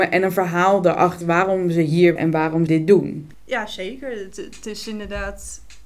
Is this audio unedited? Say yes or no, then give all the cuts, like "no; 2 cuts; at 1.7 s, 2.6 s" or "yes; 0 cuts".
no; 4 cuts; at 1.2 s, 2.2 s, 2.7 s, 4.3 s